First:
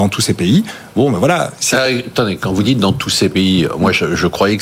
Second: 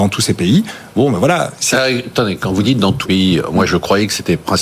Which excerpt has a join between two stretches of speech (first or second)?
second